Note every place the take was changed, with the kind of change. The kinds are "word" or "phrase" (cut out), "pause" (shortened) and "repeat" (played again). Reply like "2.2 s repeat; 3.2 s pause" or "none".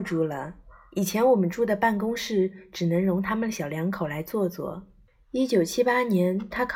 5.1 s pause